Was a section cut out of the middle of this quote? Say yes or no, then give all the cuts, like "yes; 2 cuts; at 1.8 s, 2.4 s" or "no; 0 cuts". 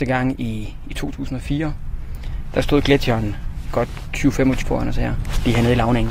yes; 2 cuts; at 3.7 s, 4.6 s